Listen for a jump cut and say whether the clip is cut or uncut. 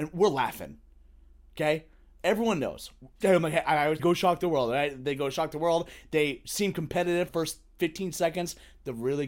cut